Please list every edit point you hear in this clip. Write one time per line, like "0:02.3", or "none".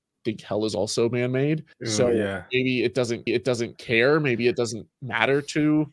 0:01.7
0:03.3